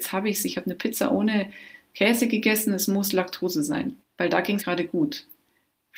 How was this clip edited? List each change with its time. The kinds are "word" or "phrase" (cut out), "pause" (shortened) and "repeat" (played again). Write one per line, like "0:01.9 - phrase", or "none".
0:04.0 - pause
0:04.6 - phrase